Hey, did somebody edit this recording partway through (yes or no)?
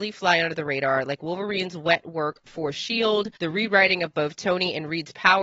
yes